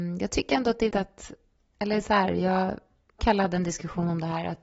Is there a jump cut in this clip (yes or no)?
yes